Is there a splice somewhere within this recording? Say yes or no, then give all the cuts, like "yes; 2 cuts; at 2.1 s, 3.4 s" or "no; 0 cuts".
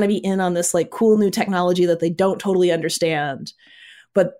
no; 0 cuts